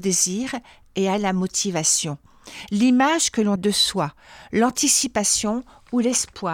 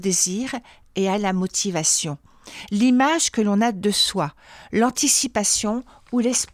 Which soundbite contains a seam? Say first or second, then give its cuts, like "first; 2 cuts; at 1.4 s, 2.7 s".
first; 1 cut; at 3.6 s